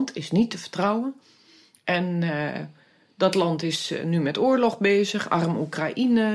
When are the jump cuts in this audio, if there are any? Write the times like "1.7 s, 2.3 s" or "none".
none